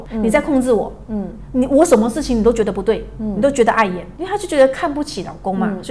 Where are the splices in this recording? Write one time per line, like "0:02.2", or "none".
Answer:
none